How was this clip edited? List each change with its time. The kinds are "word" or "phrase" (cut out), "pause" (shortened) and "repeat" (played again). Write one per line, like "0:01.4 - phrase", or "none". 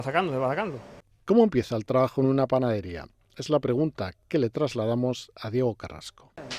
none